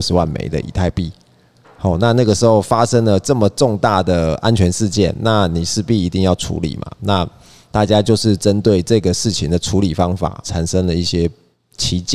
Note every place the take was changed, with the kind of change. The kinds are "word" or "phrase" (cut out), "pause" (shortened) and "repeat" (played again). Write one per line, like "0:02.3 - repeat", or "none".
0:10.4 - word